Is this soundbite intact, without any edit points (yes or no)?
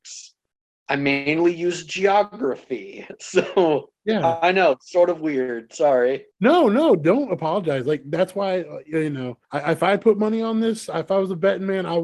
no